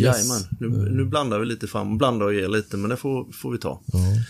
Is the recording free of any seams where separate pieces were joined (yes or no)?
yes